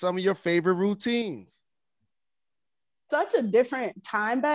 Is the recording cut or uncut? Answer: cut